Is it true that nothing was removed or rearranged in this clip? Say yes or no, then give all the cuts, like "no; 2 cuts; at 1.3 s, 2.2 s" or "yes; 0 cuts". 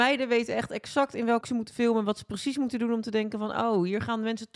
no; 1 cut; at 1.4 s